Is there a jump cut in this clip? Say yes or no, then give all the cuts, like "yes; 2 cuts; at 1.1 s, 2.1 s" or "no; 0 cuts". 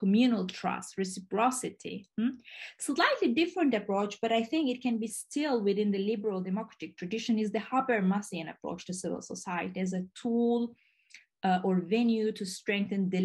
no; 0 cuts